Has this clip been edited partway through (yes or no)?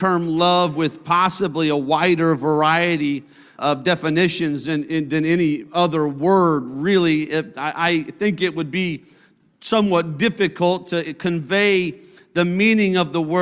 yes